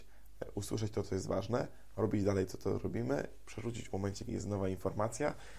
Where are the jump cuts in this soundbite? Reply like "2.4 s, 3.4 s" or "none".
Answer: 3.9 s, 4.3 s

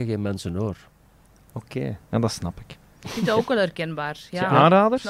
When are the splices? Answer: none

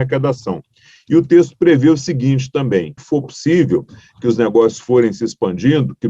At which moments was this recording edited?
3.0 s

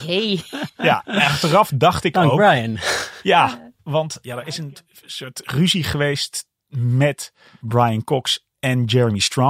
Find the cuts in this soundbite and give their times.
none

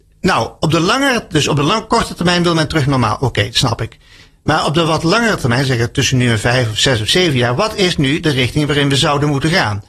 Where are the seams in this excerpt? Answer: none

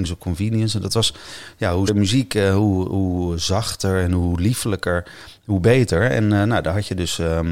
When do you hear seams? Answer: 1.9 s

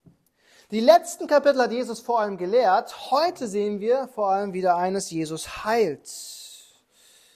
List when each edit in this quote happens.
none

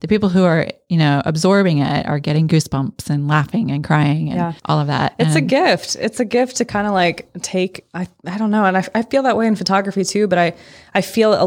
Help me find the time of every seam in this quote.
4.6 s

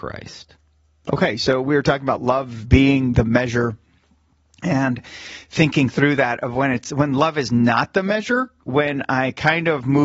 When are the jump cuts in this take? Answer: none

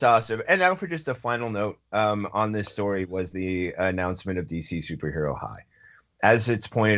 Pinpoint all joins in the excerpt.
none

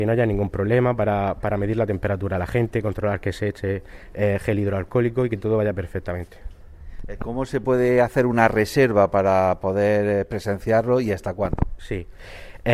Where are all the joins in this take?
none

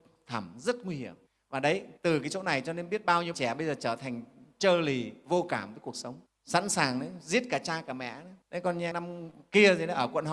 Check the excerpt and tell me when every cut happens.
1.3 s, 2.0 s, 3.3 s, 6.3 s, 8.4 s, 8.9 s

